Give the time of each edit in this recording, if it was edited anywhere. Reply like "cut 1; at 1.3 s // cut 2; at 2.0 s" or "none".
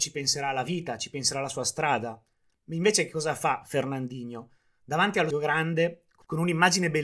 cut 1; at 5.3 s